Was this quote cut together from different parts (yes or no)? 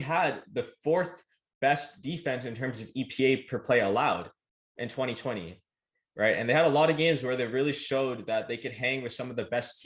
no